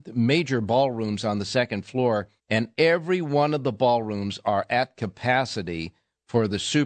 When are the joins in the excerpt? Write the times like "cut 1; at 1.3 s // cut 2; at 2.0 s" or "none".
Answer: cut 1; at 2.4 s